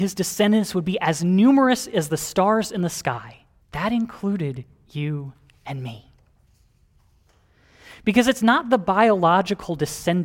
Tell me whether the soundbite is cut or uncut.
cut